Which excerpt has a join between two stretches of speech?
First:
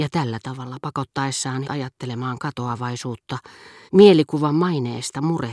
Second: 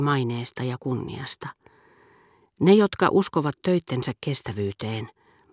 first; 2 cuts; at 1.6 s, 3.9 s

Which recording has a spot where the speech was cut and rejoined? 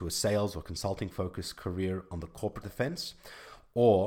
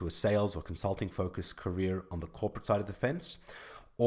first; 1 cut; at 2.6 s

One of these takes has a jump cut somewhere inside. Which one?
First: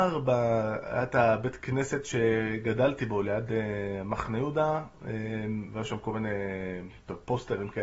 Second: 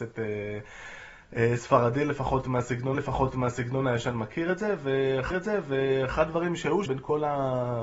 second; 3 cuts; at 2.9 s, 5.3 s, 6.9 s

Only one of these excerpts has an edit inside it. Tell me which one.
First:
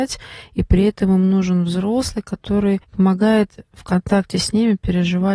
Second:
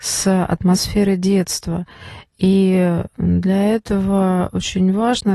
first; 1 cut; at 2.8 s

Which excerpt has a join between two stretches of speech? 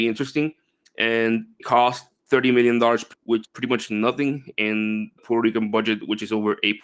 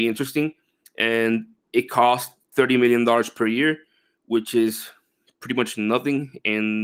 first; 4 cuts; at 1.6 s, 3.1 s, 3.4 s, 5.2 s

